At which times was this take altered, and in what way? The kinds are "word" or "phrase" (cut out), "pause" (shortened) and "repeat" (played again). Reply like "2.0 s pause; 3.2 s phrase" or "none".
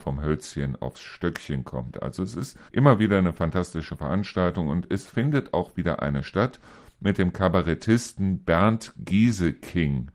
2.7 s pause